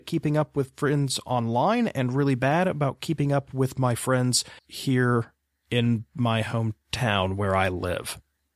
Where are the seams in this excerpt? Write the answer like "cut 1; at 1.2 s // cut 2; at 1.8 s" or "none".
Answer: cut 1; at 4.6 s